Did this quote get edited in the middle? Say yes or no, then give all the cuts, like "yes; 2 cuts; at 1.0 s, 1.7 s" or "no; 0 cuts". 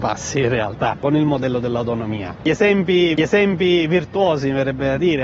yes; 1 cut; at 3.2 s